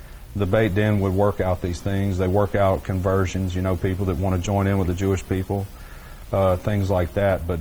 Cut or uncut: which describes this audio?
uncut